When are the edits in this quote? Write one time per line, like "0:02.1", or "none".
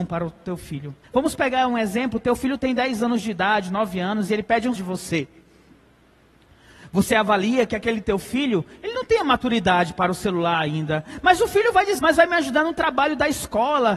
0:01.0
0:04.8
0:12.0